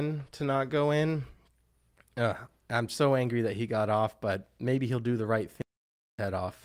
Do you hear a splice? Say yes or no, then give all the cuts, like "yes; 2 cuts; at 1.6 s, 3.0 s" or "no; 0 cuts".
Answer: no; 0 cuts